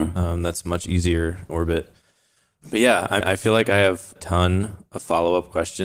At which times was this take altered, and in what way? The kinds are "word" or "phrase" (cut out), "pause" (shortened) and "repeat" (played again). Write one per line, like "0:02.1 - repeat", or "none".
0:01.5 - word
0:03.2 - word
0:04.2 - word